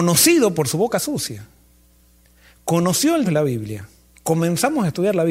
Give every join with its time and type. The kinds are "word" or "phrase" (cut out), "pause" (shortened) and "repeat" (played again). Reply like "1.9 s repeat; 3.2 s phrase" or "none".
3.2 s word